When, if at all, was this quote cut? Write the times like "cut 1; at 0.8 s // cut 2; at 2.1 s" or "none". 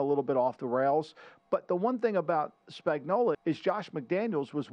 cut 1; at 3.3 s